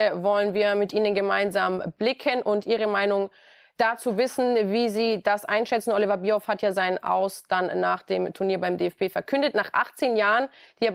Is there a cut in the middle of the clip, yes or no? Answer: no